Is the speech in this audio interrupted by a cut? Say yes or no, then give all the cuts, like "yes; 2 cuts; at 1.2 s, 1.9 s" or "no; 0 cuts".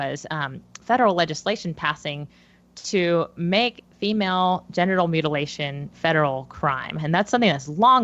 yes; 1 cut; at 5.9 s